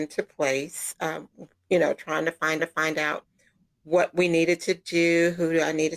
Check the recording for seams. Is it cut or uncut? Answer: cut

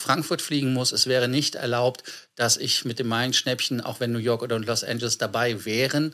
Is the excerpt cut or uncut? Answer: uncut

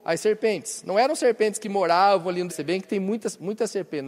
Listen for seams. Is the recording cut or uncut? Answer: cut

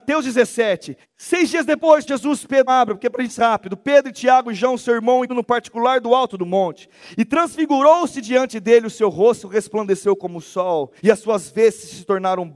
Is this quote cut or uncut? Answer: cut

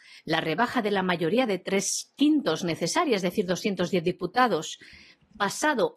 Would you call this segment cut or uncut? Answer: uncut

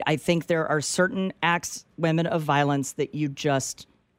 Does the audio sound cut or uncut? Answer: cut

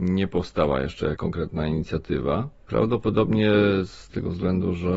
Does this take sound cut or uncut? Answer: uncut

